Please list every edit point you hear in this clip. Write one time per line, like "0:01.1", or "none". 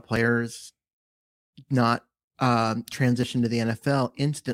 none